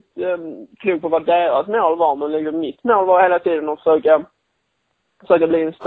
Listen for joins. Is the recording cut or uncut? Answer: uncut